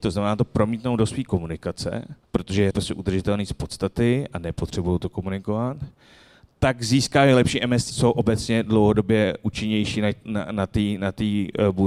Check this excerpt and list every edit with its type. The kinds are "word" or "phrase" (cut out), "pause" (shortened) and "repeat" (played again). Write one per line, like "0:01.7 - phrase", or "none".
0:02.2 - pause
0:02.7 - phrase
0:07.9 - word